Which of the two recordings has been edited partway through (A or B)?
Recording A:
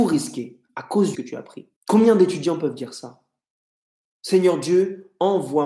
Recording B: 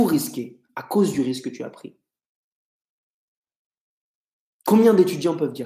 A